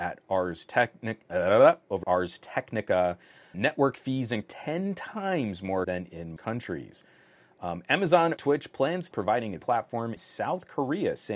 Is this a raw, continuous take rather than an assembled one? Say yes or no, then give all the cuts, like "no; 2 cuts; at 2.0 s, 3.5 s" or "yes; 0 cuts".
no; 9 cuts; at 2.0 s, 3.5 s, 4.4 s, 5.8 s, 6.4 s, 8.4 s, 9.1 s, 9.6 s, 10.2 s